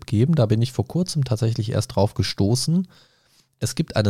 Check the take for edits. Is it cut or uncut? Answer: uncut